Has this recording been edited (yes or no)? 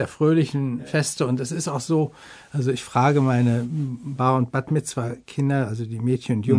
no